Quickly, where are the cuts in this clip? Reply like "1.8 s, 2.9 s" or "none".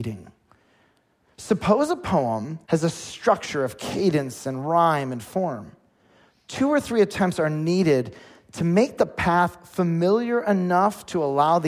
2.6 s